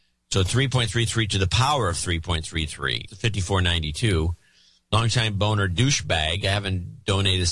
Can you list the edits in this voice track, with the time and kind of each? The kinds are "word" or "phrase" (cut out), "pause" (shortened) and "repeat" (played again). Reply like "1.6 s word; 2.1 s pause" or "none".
3.1 s word